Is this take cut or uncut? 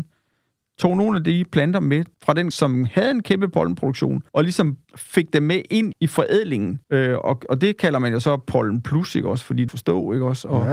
cut